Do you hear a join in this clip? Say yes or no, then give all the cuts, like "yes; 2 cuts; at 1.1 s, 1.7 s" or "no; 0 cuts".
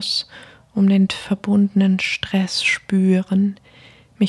yes; 1 cut; at 1.1 s